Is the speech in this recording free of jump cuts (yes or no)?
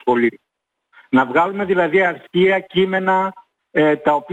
yes